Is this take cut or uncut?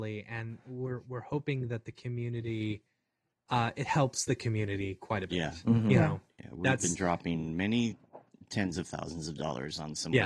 uncut